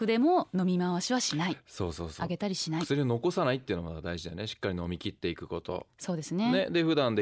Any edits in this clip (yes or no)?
no